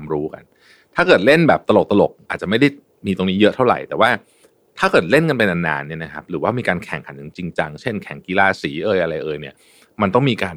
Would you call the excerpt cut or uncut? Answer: uncut